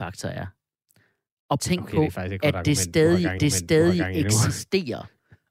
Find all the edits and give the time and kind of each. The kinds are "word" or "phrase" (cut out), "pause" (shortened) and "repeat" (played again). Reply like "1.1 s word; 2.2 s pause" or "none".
1.6 s phrase; 3.4 s repeat